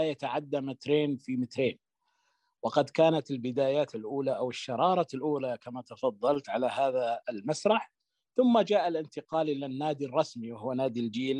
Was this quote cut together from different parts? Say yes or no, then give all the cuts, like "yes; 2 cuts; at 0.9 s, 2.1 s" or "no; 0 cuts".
no; 0 cuts